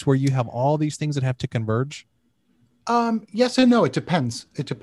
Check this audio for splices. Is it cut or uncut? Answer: uncut